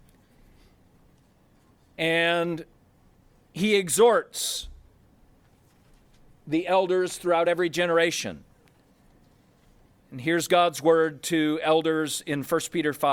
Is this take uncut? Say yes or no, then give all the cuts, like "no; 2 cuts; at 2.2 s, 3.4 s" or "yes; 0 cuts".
yes; 0 cuts